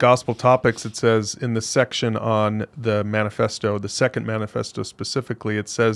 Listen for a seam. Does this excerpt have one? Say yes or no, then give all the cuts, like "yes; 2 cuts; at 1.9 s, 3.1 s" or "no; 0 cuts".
no; 0 cuts